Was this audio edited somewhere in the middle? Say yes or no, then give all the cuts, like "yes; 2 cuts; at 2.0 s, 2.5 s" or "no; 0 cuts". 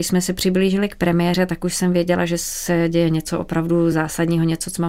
no; 0 cuts